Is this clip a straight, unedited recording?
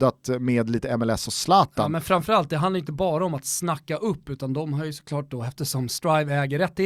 yes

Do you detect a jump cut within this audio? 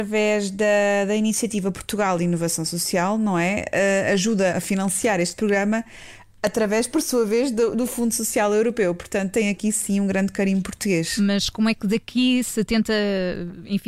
yes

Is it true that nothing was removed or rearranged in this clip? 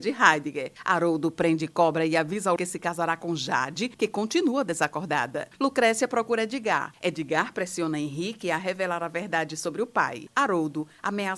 no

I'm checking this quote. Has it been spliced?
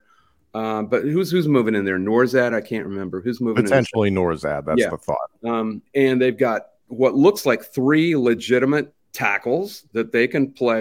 yes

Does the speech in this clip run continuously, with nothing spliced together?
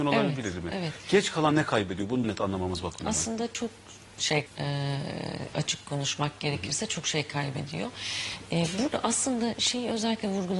no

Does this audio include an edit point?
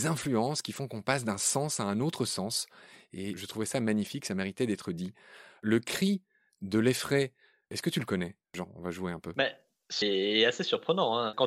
yes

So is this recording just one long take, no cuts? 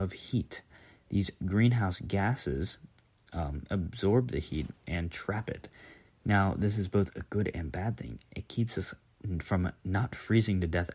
yes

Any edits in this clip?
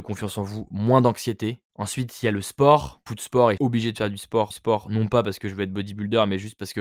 yes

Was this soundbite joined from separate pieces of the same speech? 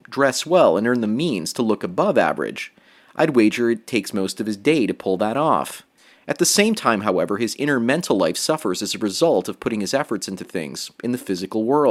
no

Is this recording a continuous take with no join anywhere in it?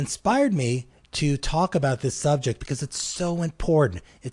yes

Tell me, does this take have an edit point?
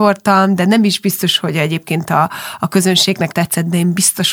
yes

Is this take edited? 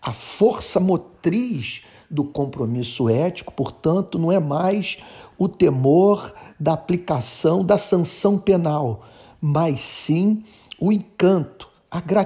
no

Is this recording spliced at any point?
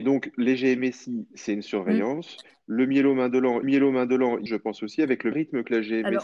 yes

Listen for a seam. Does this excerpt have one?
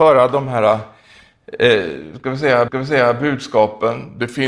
yes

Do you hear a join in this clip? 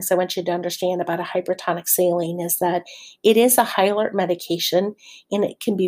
no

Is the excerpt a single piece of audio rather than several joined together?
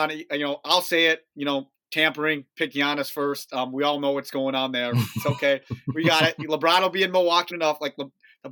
no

